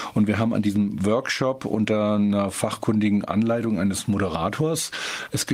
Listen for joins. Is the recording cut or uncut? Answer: uncut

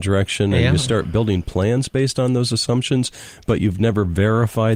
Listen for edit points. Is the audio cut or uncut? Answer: uncut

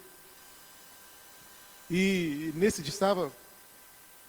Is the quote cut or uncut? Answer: cut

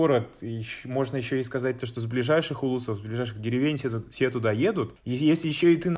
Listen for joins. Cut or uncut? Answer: uncut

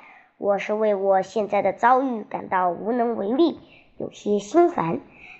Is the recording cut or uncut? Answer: uncut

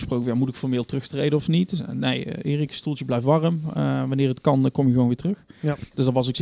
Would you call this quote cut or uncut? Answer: uncut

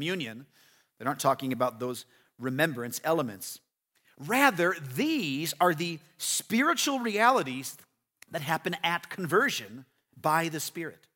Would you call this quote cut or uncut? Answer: uncut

